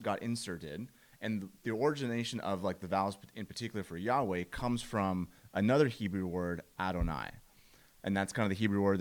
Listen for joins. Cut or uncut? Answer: uncut